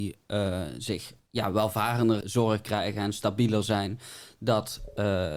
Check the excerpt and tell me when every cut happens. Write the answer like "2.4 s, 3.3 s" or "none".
1.2 s, 2.2 s